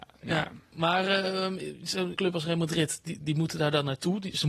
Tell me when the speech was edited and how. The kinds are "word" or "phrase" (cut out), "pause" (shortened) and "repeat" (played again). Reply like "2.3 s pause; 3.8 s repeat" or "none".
2.1 s phrase